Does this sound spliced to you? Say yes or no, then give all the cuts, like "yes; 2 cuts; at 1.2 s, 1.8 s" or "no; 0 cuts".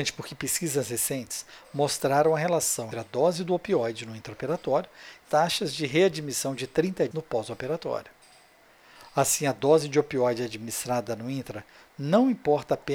yes; 3 cuts; at 2.9 s, 5.3 s, 7.1 s